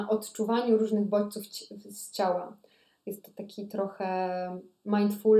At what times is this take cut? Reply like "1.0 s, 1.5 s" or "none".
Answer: none